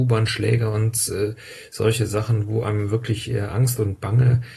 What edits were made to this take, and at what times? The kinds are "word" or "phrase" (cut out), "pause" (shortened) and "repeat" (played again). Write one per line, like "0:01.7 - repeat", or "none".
none